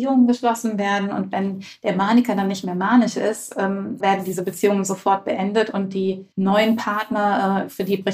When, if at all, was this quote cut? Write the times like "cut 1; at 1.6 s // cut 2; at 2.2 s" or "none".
cut 1; at 4.0 s // cut 2; at 6.3 s